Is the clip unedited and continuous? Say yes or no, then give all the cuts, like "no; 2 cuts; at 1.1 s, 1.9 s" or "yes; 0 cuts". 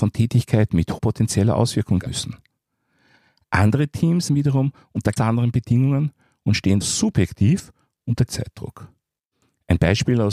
no; 6 cuts; at 1.0 s, 2.1 s, 4.3 s, 5.2 s, 6.8 s, 8.3 s